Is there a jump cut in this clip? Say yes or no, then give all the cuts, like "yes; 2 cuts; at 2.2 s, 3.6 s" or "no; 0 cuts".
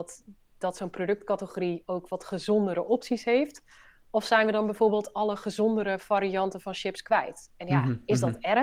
no; 0 cuts